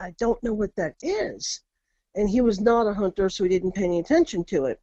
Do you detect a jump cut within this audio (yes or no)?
no